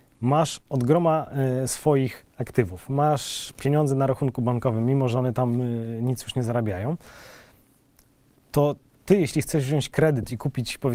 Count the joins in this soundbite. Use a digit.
0